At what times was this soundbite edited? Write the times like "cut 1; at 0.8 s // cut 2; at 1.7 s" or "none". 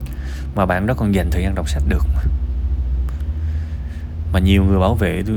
none